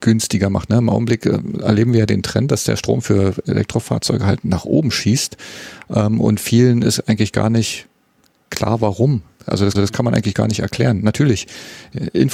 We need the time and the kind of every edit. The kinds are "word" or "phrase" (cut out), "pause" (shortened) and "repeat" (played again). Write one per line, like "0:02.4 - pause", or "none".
0:09.8 - repeat